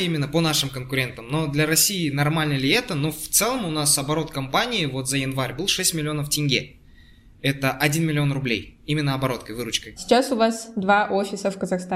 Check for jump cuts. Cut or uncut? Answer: uncut